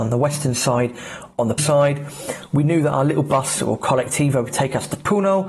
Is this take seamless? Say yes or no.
no